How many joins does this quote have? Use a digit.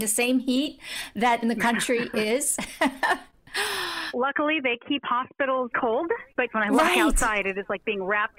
4